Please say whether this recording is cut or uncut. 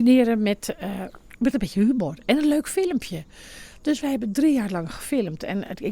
uncut